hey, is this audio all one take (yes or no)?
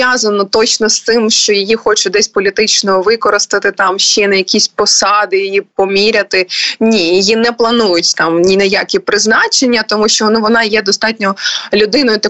yes